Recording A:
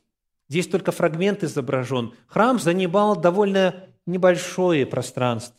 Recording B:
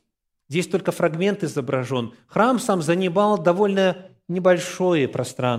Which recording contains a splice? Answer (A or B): A